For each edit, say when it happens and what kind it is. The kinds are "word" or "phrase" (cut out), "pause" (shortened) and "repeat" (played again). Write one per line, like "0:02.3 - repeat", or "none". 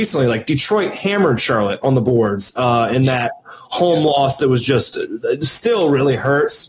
none